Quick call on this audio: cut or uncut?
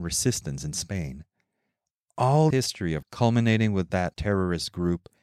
cut